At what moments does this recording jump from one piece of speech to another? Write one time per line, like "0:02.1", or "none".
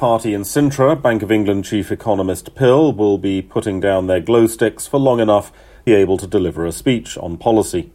0:05.9

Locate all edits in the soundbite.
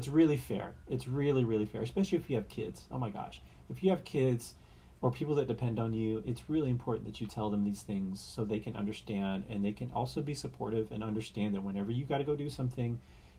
none

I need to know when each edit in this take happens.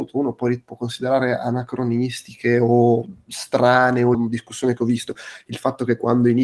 0:04.1

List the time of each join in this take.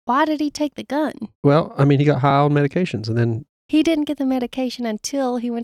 none

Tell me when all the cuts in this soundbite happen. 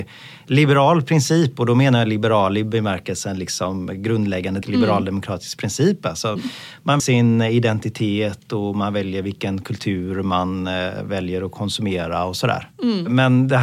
0:04.6
0:06.4
0:07.0

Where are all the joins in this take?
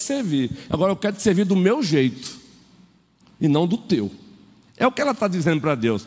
none

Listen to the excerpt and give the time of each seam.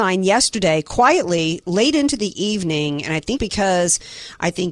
0:03.4

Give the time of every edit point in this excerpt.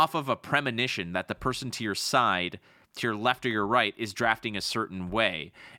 none

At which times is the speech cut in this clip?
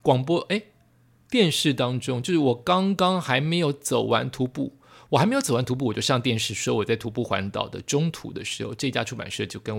none

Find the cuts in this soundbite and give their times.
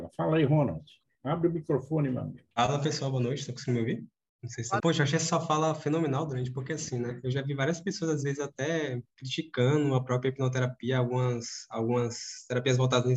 0:01.0
0:02.5
0:04.8

